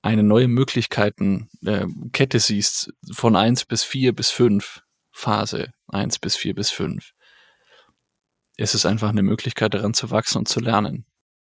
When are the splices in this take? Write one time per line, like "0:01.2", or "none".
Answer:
none